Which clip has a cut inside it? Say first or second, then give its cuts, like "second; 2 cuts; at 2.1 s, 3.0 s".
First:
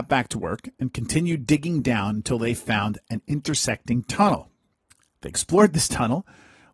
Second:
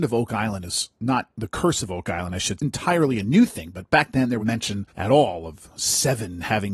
second; 3 cuts; at 2.6 s, 4.4 s, 4.9 s